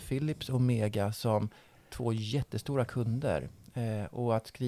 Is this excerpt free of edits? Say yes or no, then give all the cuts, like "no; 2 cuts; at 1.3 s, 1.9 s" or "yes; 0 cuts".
yes; 0 cuts